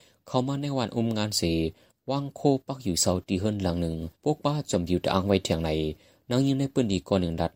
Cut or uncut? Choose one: cut